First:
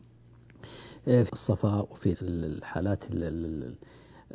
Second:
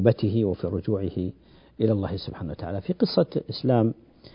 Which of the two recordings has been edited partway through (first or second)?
first